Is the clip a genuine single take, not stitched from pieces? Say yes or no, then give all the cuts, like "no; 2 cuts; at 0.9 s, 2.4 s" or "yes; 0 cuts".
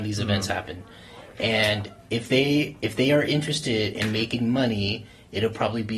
yes; 0 cuts